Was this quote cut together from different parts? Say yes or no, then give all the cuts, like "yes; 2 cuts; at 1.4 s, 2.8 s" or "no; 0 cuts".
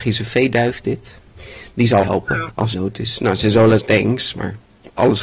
yes; 3 cuts; at 2.0 s, 2.7 s, 3.8 s